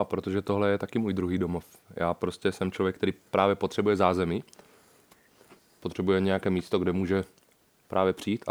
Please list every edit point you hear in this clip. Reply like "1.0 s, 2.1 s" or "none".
none